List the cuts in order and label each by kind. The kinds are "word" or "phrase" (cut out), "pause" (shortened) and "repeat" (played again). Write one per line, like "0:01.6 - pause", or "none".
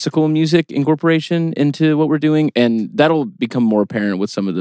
none